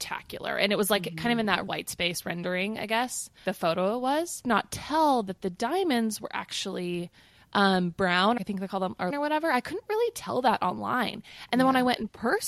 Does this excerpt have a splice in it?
yes; 4 cuts; at 3.4 s, 4.4 s, 8.4 s, 9.1 s

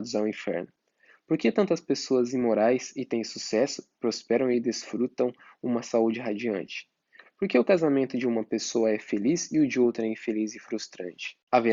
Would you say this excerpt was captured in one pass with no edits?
yes; 0 cuts

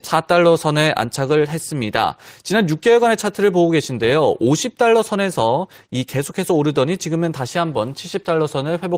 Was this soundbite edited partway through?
no; 0 cuts

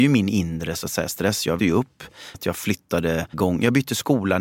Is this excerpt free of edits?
no; 3 cuts; at 1.6 s, 2.3 s, 3.3 s

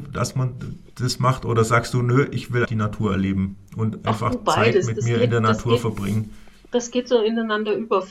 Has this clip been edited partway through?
yes; 1 cut; at 2.6 s

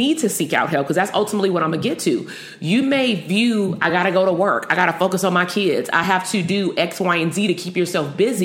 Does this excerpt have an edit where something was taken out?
no; 0 cuts

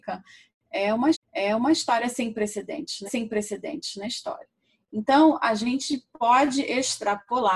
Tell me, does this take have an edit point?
yes; 2 cuts; at 1.1 s, 3.1 s

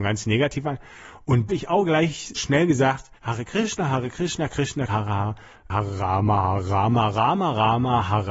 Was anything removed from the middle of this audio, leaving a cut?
yes; 5 cuts; at 1.5 s, 2.4 s, 3.2 s, 4.9 s, 5.5 s

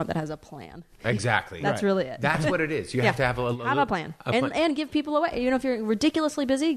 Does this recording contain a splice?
no; 0 cuts

